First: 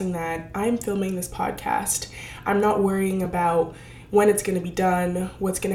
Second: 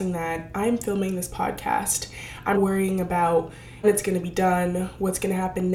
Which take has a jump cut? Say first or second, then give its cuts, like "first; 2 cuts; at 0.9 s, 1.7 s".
second; 2 cuts; at 2.5 s, 3.8 s